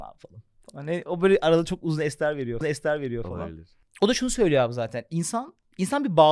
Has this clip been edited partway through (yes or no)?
yes